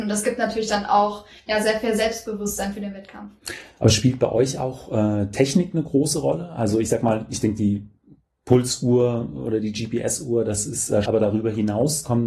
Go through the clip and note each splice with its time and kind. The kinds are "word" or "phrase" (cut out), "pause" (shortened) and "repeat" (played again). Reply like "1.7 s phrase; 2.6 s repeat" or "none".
11.1 s word